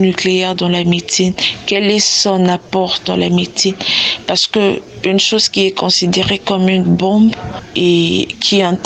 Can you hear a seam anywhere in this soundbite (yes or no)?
no